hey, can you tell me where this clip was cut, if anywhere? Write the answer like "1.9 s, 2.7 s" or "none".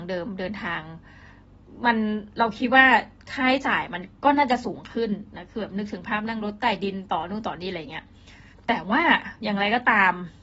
4.1 s, 8.5 s